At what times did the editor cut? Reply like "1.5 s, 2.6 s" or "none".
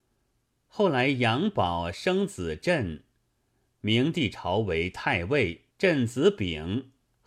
5.7 s